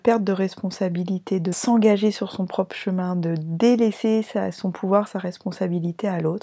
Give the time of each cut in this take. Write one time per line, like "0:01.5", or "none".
0:01.5